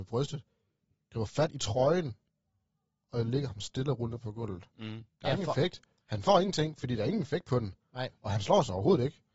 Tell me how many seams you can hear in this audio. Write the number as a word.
one